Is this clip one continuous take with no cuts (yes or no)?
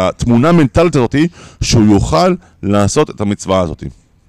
yes